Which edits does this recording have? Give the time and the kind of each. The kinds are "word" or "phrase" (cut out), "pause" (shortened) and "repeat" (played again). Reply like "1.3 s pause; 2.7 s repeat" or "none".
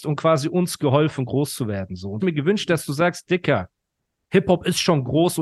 2.2 s phrase